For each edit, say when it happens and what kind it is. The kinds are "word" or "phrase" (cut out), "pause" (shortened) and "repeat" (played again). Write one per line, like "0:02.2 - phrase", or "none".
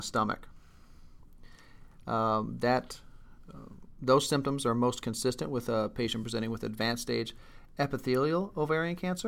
none